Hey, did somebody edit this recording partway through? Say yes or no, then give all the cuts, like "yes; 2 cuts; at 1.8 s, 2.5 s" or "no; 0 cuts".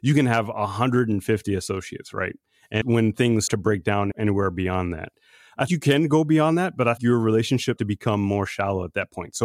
yes; 6 cuts; at 2.8 s, 3.5 s, 4.1 s, 5.7 s, 7.0 s, 7.8 s